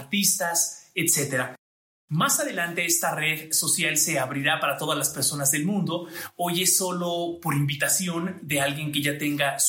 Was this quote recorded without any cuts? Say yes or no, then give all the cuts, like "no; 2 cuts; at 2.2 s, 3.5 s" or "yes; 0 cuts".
yes; 0 cuts